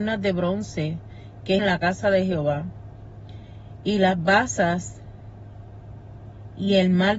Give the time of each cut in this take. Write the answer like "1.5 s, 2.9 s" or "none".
1.6 s